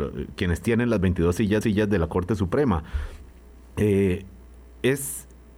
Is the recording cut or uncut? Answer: cut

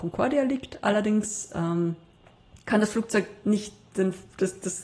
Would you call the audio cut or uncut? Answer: uncut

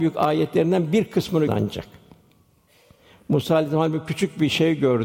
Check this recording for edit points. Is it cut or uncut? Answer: cut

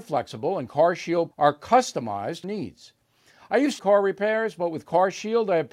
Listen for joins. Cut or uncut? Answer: cut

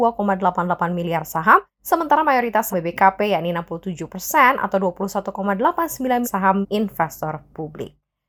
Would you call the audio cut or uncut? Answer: cut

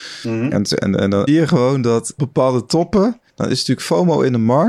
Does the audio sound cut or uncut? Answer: cut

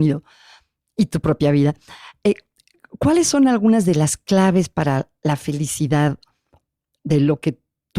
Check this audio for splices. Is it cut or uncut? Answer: uncut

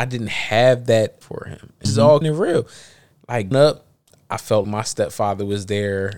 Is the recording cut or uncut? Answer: cut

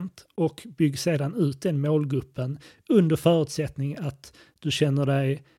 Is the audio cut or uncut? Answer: uncut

